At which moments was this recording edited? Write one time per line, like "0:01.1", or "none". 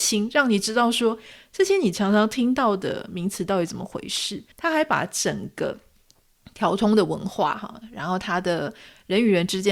0:04.5